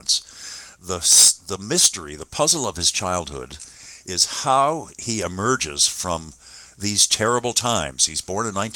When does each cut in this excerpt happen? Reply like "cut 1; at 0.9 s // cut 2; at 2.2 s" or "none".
none